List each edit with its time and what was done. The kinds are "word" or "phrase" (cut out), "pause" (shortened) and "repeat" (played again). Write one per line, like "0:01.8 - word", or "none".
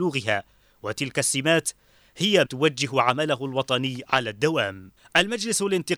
0:02.4 - word
0:05.0 - pause

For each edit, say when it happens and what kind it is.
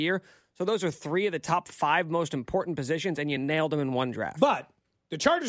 none

